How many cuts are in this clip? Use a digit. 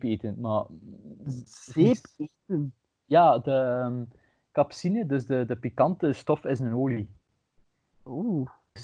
0